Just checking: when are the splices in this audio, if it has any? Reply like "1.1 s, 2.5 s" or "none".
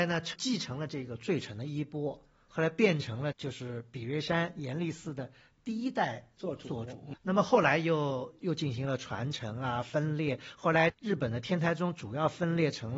7.1 s